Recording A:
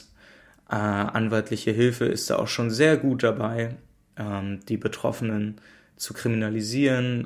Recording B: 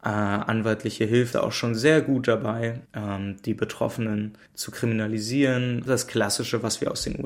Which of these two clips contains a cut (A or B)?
B